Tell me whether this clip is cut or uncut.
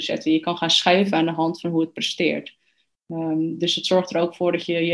uncut